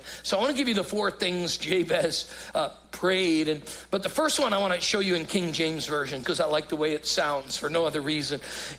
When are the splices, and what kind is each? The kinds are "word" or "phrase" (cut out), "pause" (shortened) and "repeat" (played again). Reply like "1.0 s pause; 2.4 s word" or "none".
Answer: 6.2 s word